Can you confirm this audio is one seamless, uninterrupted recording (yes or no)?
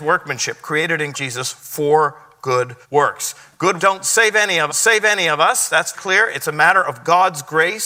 no